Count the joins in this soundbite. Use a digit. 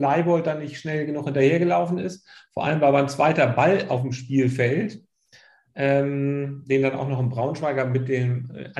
0